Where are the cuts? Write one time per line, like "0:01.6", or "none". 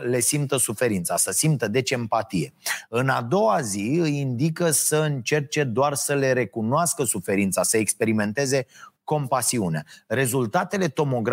none